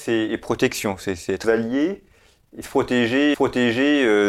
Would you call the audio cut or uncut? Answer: cut